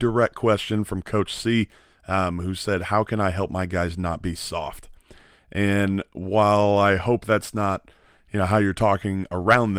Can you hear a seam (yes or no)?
no